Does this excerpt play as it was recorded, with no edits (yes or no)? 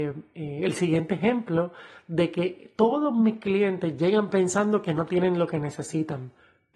yes